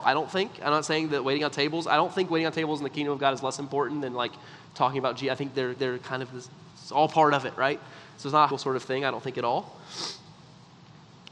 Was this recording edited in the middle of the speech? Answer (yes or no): yes